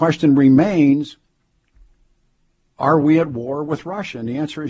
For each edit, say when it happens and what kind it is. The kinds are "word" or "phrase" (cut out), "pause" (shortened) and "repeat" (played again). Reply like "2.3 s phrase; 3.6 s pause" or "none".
none